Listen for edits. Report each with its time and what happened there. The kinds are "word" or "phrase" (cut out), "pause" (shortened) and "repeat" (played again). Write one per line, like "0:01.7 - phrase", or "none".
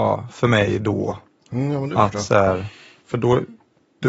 none